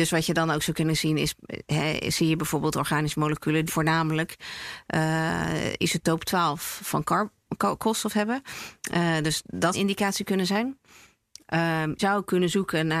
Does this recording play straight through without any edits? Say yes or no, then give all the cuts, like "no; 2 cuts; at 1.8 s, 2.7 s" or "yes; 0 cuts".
no; 3 cuts; at 3.7 s, 9.7 s, 12.0 s